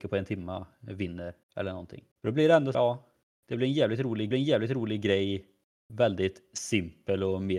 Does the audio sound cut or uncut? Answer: cut